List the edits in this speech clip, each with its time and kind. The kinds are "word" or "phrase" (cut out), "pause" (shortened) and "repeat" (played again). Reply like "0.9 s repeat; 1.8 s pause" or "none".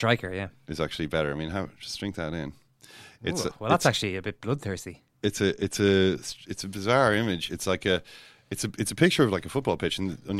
none